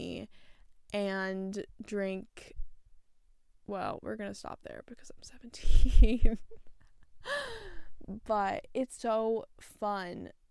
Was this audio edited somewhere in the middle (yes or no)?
yes